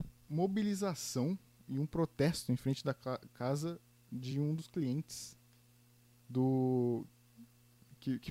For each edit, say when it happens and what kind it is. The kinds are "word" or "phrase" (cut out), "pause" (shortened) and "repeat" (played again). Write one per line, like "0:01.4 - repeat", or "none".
none